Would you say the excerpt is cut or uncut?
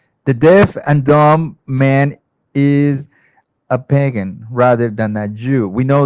uncut